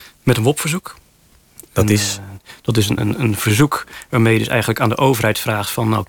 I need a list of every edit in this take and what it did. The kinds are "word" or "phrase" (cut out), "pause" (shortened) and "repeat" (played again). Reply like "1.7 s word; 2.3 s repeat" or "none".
3.0 s word